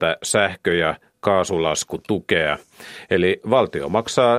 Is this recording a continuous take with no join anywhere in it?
yes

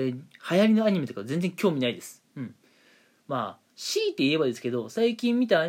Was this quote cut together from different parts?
no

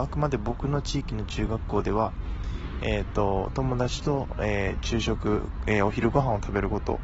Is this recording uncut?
yes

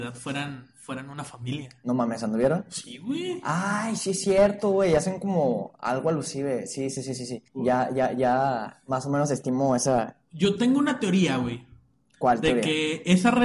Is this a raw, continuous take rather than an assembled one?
no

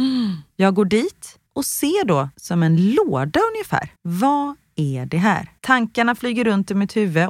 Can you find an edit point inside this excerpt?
yes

